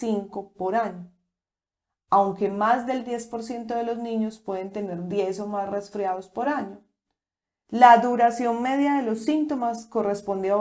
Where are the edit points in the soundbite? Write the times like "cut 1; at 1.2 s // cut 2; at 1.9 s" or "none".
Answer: none